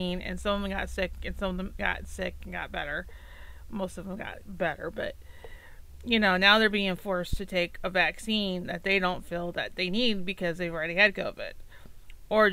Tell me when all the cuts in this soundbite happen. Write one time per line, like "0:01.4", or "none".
0:01.8